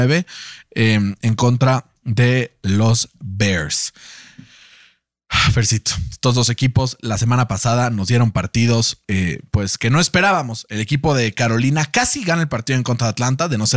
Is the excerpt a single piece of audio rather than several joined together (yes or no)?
no